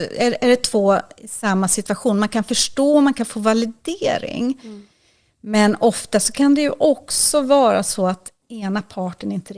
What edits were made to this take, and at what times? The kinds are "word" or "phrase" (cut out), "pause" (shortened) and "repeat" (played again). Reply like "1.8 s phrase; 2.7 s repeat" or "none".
none